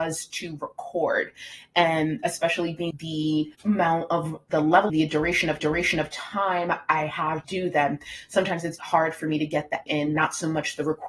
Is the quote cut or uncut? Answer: cut